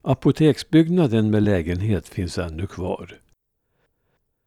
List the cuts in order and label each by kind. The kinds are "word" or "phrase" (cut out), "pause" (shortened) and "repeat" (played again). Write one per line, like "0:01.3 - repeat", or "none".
none